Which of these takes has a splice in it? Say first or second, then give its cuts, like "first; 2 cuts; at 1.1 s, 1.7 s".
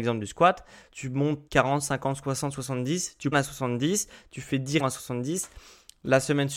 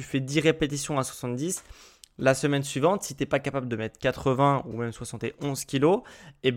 first; 3 cuts; at 1.5 s, 3.3 s, 4.8 s